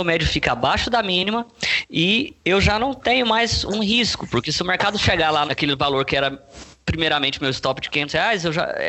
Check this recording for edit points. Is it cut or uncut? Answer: cut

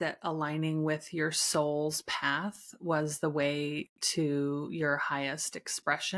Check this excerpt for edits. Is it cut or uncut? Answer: uncut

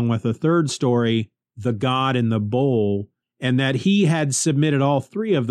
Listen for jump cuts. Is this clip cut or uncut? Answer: uncut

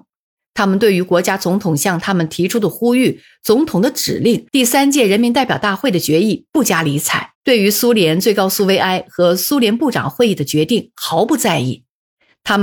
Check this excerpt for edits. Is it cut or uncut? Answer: cut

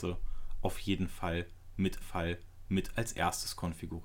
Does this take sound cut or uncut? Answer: cut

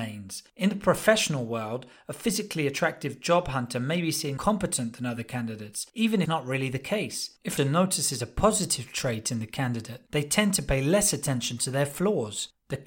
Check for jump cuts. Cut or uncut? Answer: cut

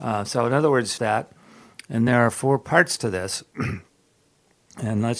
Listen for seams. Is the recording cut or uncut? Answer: cut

